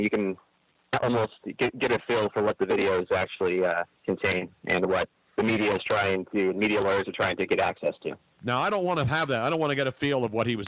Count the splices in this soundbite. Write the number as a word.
one